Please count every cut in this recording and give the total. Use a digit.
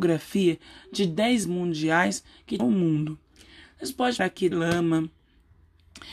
4